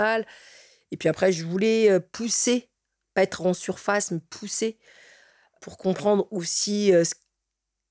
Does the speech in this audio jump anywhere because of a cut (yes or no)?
no